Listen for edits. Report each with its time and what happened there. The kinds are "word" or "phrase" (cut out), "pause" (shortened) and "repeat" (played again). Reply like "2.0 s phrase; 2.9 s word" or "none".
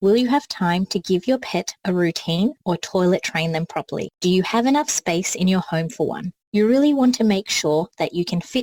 4.1 s pause; 6.4 s pause